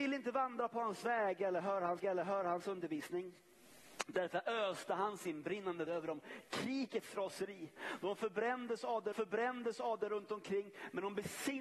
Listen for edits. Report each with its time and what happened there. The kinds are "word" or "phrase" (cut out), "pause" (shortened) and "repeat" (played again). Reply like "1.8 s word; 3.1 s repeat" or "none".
2.0 s repeat; 5.9 s word; 9.1 s repeat